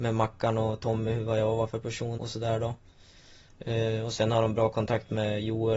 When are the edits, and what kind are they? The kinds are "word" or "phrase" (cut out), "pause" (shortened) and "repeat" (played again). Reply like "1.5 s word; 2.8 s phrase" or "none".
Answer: 2.2 s word

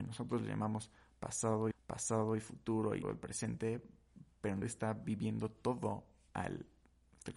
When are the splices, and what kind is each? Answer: 1.7 s repeat; 3.0 s word; 4.6 s word

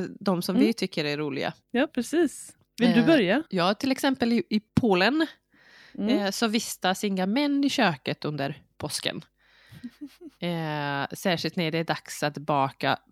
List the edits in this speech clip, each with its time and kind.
1.6 s pause; 3.5 s pause; 4.7 s pause

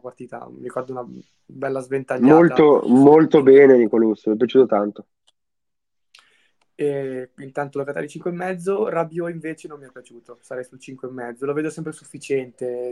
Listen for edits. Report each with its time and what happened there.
none

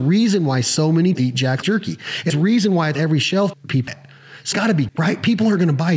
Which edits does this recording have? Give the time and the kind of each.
1.1 s word; 1.6 s word; 2.3 s word; 2.9 s word; 3.5 s word; 3.9 s word; 4.5 s word; 4.9 s word

